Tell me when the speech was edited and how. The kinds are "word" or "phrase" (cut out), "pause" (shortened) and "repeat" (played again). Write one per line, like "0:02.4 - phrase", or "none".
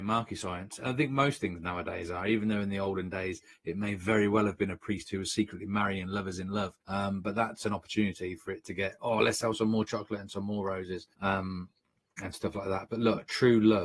0:06.8 - pause
0:11.1 - pause